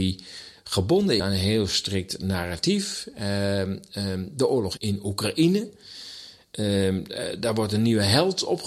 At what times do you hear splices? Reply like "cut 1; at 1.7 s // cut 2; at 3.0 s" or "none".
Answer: cut 1; at 1.2 s // cut 2; at 4.8 s